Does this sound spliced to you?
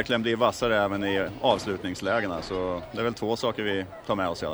no; 0 cuts

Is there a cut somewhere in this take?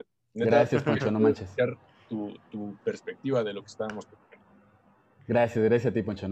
no; 0 cuts

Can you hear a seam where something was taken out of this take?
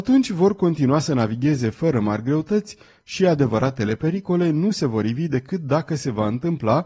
no; 0 cuts

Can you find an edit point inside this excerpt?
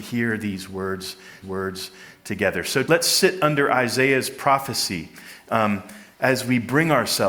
yes; 3 cuts; at 1.4 s, 2.9 s, 6.1 s

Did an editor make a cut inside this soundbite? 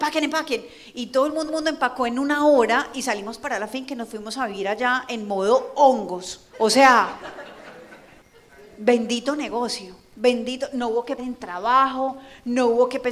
yes; 4 cuts; at 1.5 s, 6.5 s, 8.2 s, 11.2 s

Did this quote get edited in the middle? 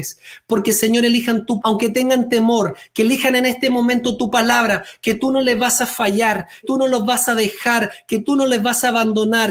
yes; 2 cuts; at 1.6 s, 6.6 s

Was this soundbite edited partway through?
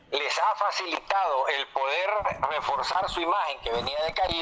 no; 0 cuts

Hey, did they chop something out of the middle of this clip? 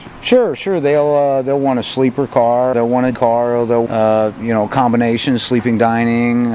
yes; 3 cuts; at 2.7 s, 3.1 s, 3.9 s

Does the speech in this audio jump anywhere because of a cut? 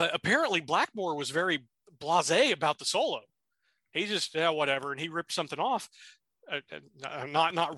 no; 0 cuts

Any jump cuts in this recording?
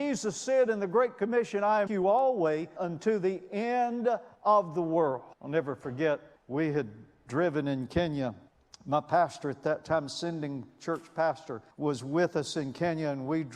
yes; 7 cuts; at 1.9 s, 2.8 s, 4.3 s, 5.3 s, 6.4 s, 8.5 s, 11.7 s

